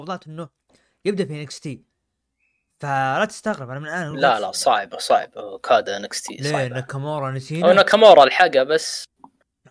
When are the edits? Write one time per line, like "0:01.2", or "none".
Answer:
none